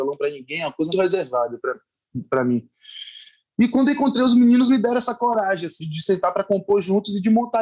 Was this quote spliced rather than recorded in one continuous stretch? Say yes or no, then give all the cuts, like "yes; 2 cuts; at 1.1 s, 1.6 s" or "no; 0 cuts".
yes; 3 cuts; at 0.9 s, 4.7 s, 5.8 s